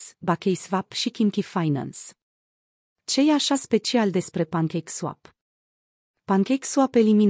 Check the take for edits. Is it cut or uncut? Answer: uncut